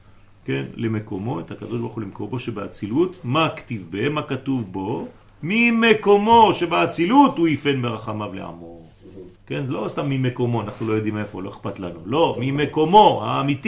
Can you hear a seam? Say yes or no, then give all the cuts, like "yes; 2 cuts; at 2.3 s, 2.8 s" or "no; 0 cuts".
yes; 1 cut; at 9.4 s